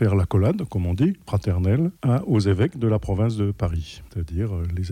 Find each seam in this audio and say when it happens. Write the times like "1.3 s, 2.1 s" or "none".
2.0 s